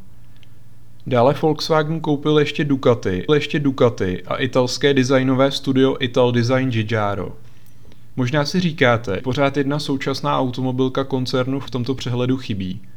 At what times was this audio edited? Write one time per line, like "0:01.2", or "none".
0:03.3
0:09.2
0:11.7